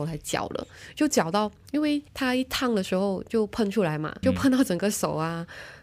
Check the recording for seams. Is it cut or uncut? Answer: cut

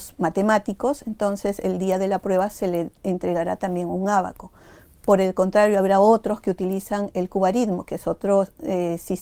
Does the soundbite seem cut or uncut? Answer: uncut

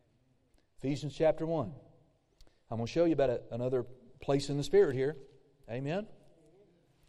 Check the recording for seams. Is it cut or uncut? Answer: uncut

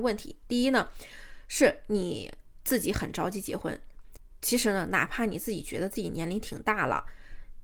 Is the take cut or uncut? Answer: uncut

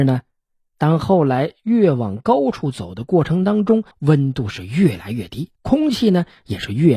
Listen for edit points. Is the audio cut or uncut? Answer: cut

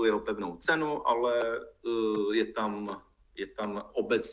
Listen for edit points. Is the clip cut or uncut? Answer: uncut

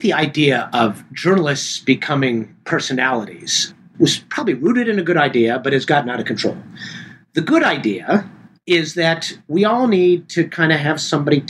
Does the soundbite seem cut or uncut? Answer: uncut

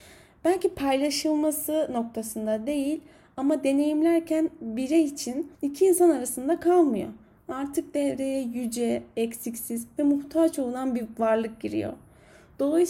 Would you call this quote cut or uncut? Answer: cut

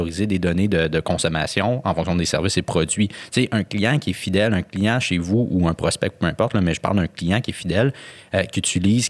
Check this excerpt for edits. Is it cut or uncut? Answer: uncut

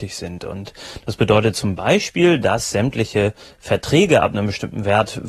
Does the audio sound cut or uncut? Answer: uncut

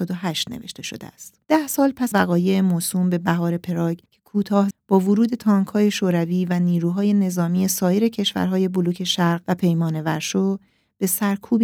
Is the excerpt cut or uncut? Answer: cut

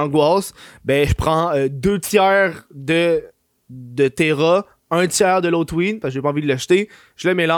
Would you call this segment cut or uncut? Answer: uncut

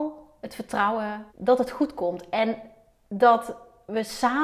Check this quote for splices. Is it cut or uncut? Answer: cut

